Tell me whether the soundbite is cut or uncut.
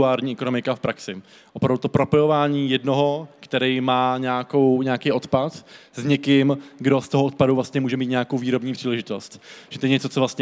uncut